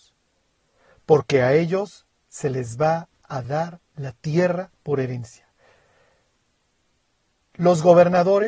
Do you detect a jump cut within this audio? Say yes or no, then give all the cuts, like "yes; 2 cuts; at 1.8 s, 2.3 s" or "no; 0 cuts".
no; 0 cuts